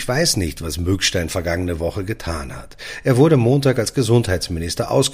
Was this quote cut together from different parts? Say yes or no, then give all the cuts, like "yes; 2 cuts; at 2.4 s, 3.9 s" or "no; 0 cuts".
no; 0 cuts